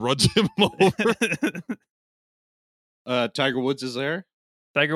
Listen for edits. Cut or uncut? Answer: uncut